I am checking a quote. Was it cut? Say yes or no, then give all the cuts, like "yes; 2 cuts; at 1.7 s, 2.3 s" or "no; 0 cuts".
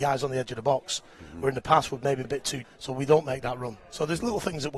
yes; 2 cuts; at 2.2 s, 2.6 s